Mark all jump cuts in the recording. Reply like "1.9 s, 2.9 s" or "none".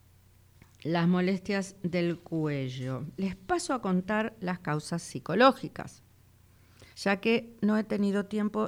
6.9 s

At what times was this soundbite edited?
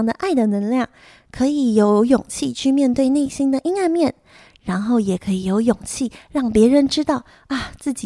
none

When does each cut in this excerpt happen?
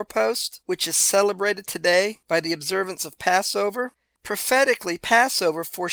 none

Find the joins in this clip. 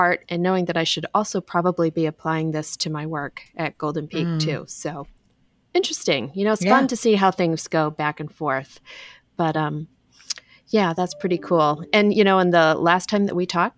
none

